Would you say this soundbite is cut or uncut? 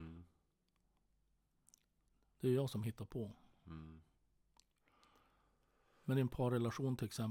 uncut